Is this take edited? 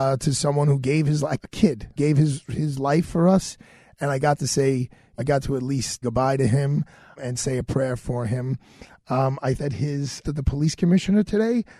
yes; 7 cuts; at 1.4 s, 2.0 s, 5.2 s, 6.0 s, 7.2 s, 9.6 s, 10.2 s

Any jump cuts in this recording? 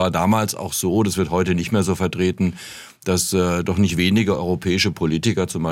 no; 0 cuts

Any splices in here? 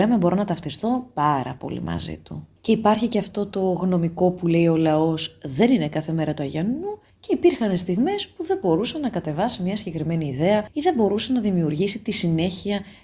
no; 0 cuts

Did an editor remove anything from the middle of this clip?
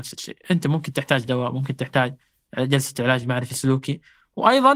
no; 0 cuts

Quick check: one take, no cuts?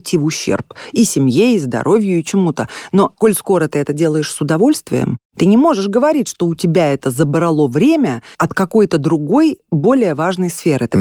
no; 1 cut; at 8.3 s

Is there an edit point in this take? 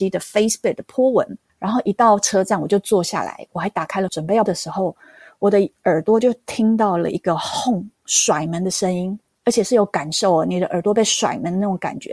yes; 2 cuts; at 4.1 s, 4.5 s

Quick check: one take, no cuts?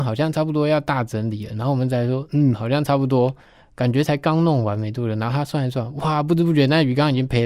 yes; 0 cuts

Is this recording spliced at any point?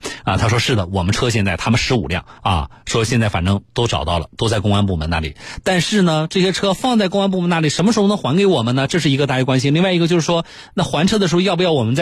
yes; 1 cut; at 2.4 s

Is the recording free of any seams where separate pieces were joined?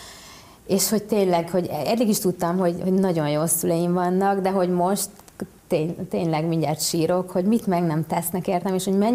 yes; 0 cuts

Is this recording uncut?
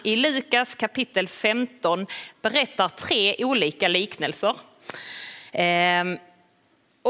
yes; 0 cuts

